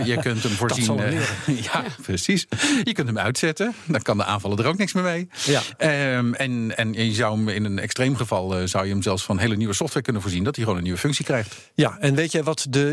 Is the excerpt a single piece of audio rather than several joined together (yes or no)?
yes